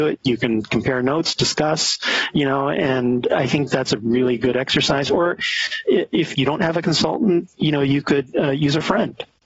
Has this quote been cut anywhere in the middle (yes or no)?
yes